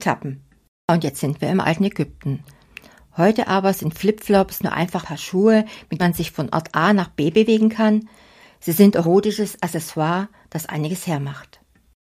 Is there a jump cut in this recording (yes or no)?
yes